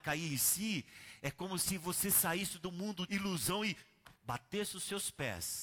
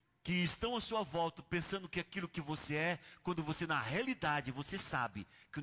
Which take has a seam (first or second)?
first